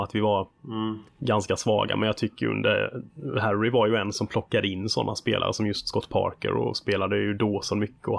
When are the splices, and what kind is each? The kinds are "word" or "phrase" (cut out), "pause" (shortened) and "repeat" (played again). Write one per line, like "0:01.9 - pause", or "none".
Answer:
0:01.1 - pause

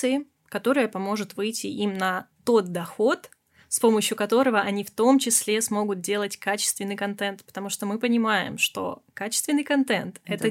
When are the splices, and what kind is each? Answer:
none

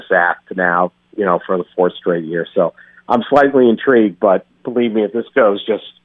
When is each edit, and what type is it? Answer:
none

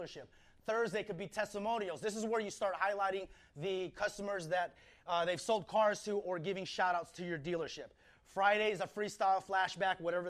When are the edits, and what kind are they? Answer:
none

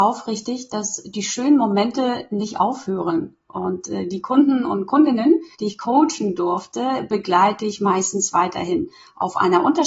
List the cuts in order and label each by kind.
0:05.5 - pause

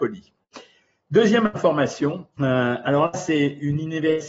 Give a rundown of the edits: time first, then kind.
0:02.3 - pause

